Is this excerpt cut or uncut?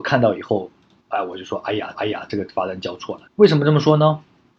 cut